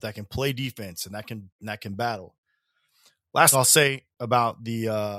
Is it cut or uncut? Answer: cut